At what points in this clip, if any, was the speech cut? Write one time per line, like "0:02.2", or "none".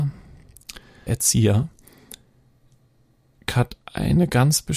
0:01.1